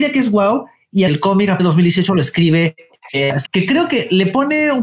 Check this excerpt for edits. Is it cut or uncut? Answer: cut